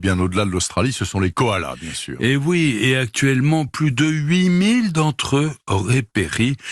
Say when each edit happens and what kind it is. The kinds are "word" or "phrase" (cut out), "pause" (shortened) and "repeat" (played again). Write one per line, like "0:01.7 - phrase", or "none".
none